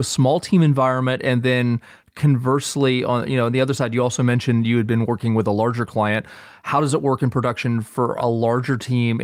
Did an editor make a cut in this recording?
no; 0 cuts

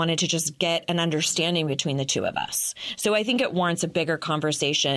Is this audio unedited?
yes; 0 cuts

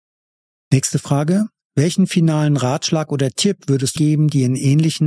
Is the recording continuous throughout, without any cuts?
no; 1 cut; at 4.0 s

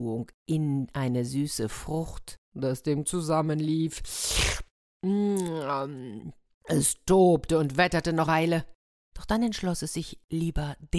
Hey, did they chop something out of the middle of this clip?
yes; 3 cuts; at 2.4 s, 3.1 s, 8.3 s

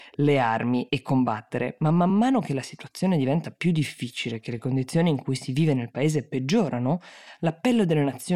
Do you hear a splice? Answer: no; 0 cuts

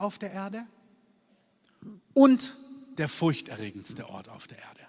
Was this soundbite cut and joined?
no; 0 cuts

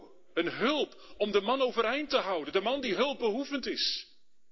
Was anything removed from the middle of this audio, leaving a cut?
no; 0 cuts

